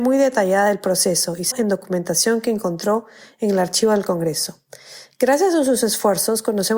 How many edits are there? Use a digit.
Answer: 1